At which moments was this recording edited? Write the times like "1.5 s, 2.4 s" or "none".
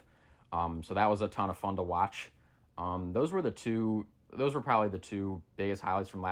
none